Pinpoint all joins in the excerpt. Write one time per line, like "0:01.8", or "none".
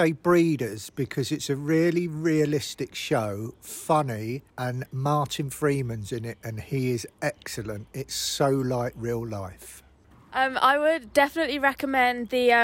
0:04.5
0:10.0